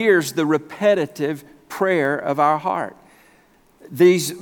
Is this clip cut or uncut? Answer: uncut